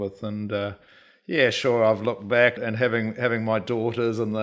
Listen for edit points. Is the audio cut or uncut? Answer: cut